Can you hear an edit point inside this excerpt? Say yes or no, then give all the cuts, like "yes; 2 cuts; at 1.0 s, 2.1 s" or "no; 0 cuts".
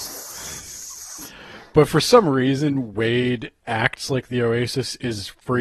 no; 0 cuts